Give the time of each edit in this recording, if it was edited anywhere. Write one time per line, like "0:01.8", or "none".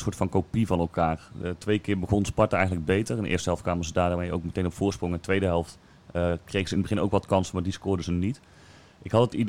none